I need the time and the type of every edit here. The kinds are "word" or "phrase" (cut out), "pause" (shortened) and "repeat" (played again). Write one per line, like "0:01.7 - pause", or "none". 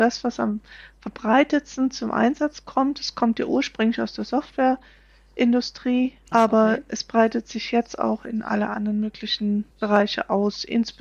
0:06.3 - word
0:09.7 - pause